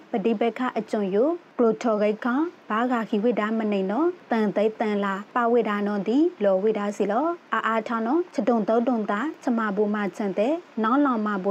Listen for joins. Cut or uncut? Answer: uncut